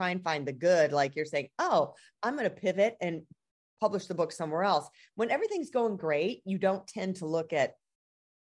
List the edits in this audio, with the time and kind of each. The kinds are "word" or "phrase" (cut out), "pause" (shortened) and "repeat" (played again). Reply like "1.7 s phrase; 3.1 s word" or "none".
none